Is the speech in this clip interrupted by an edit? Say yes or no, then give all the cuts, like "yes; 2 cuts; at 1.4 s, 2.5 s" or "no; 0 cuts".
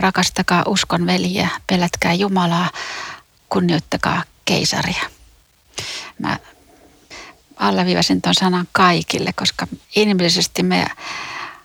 yes; 1 cut; at 9.8 s